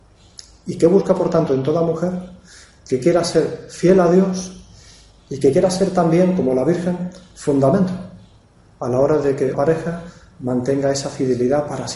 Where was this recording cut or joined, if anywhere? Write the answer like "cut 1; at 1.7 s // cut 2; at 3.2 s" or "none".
cut 1; at 9.5 s